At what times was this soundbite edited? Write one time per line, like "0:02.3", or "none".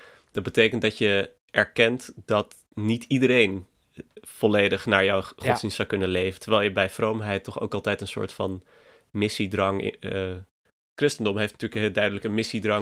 none